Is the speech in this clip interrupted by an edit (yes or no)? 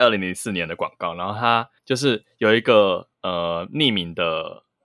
yes